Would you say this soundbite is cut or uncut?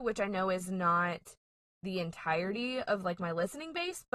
uncut